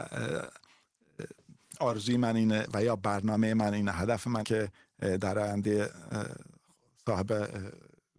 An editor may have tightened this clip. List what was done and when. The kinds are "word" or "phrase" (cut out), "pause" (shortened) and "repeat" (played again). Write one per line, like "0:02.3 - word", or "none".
0:04.4 - word